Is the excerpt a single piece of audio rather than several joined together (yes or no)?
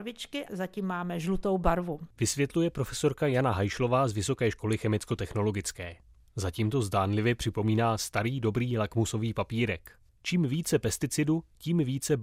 yes